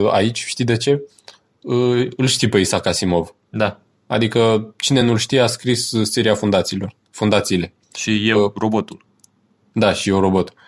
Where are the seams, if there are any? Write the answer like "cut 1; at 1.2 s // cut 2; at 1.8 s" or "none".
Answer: none